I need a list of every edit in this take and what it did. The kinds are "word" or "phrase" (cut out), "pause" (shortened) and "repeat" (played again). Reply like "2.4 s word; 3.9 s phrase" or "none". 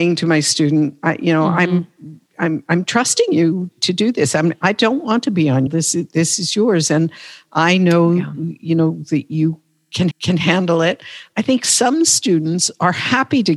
3.7 s word; 5.7 s phrase; 10.1 s repeat